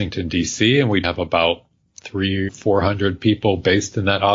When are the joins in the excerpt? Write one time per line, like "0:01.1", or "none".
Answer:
0:01.0
0:02.5